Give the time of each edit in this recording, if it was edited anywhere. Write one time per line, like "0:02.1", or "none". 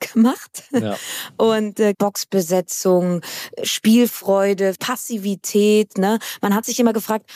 0:01.9
0:04.8